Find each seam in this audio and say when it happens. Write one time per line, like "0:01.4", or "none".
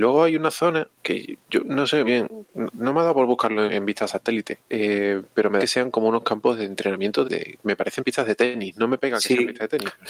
0:01.0
0:02.1
0:03.7
0:04.6
0:05.6
0:07.2